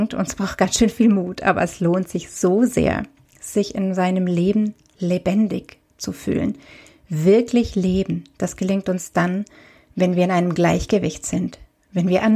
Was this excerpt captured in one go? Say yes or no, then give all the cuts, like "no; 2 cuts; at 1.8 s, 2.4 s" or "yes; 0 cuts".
yes; 0 cuts